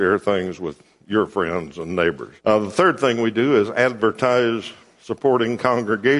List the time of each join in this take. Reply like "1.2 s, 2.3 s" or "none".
2.4 s